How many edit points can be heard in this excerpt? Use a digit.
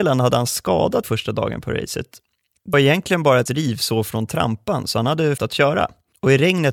4